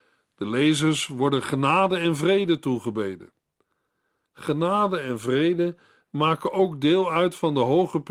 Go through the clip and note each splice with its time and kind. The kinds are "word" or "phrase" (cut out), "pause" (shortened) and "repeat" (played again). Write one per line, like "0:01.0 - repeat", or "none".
none